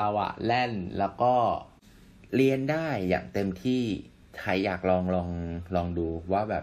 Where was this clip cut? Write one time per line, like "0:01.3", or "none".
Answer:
0:04.2